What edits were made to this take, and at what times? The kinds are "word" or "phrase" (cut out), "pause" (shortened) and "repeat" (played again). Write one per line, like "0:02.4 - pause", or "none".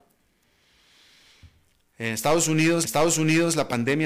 0:02.8 - repeat